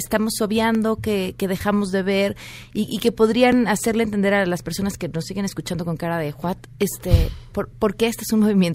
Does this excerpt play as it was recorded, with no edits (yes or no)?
yes